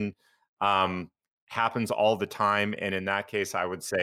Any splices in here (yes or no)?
no